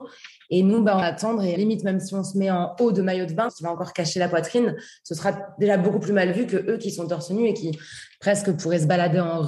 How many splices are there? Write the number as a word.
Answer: three